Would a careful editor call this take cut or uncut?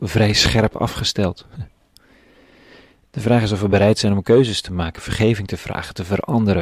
uncut